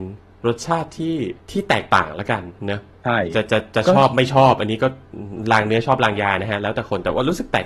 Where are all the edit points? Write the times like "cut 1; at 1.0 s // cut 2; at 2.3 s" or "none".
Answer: cut 1; at 1.4 s // cut 2; at 2.6 s